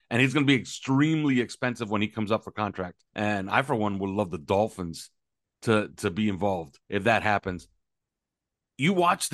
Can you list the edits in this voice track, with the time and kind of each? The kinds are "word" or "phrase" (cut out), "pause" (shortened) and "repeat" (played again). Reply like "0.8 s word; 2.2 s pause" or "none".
3.1 s pause; 6.8 s pause